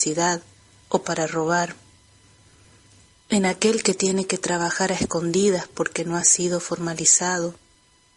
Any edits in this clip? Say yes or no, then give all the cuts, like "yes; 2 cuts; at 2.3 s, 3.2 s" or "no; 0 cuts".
no; 0 cuts